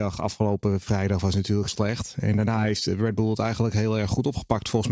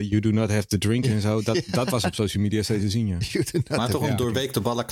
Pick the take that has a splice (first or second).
first